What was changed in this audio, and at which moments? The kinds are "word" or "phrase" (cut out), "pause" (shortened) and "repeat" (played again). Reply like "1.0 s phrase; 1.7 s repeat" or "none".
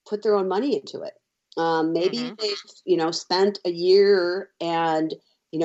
none